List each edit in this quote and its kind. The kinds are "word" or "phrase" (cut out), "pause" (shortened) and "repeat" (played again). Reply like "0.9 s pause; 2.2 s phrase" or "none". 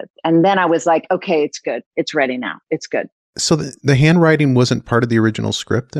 none